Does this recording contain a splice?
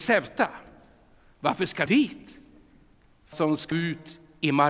yes; 3 cuts; at 1.9 s, 3.3 s, 3.7 s

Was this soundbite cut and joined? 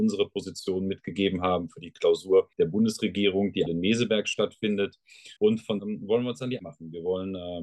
yes; 5 cuts; at 2.5 s, 3.7 s, 5.4 s, 5.8 s, 6.6 s

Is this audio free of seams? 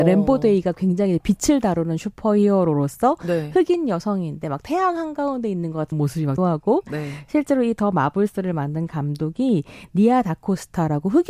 no; 2 cuts; at 5.9 s, 6.4 s

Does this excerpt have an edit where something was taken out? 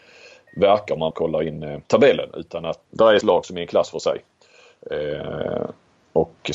yes; 4 cuts; at 1.1 s, 1.8 s, 2.9 s, 3.2 s

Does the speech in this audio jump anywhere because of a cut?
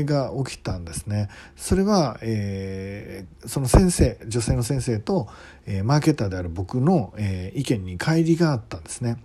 yes; 1 cut; at 3.3 s

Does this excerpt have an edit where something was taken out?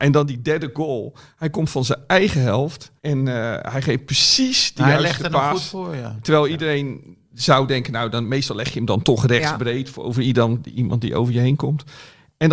yes; 1 cut; at 3.0 s

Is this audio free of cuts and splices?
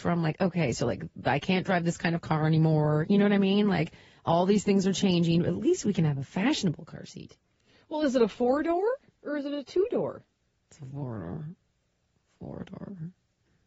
yes; 0 cuts

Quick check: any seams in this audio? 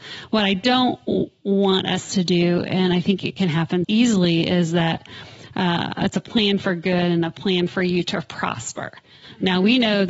yes; 1 cut; at 3.8 s

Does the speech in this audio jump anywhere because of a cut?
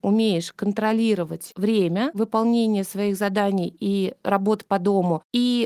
yes; 1 cut; at 4.2 s

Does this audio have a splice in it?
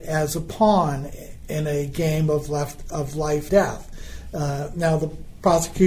yes; 2 cuts; at 2.9 s, 3.5 s

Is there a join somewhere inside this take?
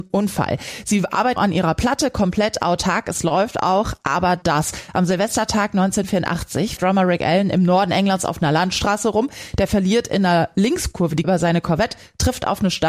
yes; 4 cuts; at 1.4 s, 4.4 s, 6.8 s, 11.2 s

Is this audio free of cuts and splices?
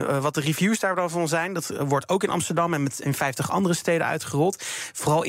yes; 0 cuts

